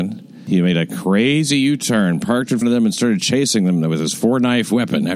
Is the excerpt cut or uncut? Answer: cut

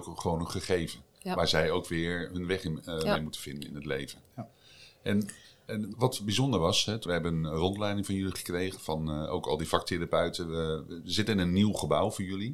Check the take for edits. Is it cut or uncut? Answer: cut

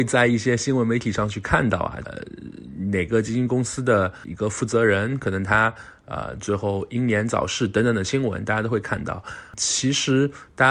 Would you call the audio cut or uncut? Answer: cut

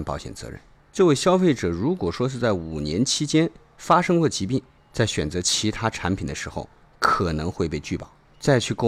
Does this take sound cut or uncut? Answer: uncut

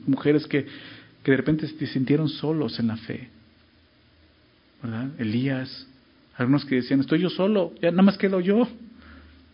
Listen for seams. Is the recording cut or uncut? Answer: uncut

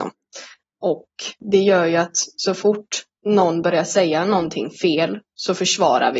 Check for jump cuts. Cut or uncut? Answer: uncut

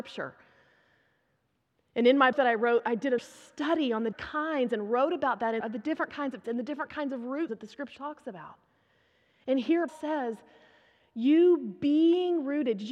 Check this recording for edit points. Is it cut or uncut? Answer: cut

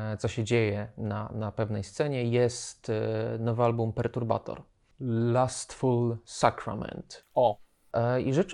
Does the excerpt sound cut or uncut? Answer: uncut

